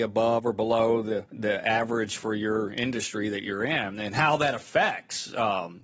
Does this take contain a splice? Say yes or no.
yes